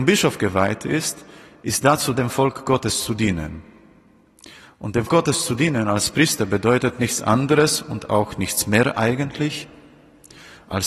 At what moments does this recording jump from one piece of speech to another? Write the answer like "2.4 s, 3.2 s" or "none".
2.1 s, 5.1 s